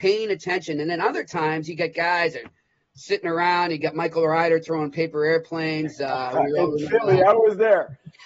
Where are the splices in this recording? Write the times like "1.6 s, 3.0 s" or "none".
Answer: none